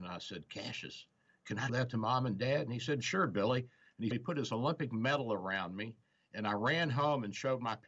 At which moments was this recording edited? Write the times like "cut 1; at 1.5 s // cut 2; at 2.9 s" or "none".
cut 1; at 1.7 s // cut 2; at 4.1 s